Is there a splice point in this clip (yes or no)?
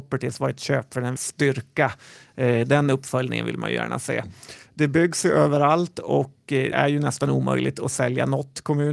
yes